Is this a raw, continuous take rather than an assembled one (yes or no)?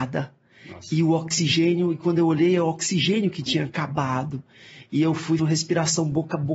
no